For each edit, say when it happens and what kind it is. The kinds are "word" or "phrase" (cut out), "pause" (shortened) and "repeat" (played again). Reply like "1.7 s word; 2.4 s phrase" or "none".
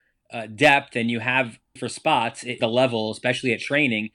1.8 s word; 2.6 s phrase